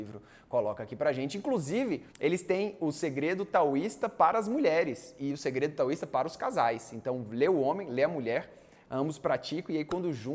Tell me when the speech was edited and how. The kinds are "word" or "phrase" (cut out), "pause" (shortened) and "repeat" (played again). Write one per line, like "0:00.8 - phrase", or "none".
0:02.1 - pause